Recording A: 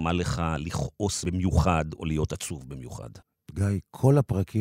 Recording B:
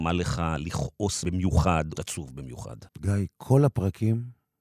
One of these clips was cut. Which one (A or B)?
B